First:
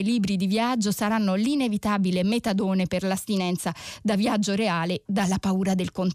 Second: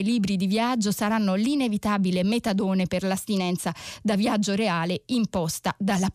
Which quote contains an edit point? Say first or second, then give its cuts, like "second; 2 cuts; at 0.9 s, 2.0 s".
first; 1 cut; at 5.1 s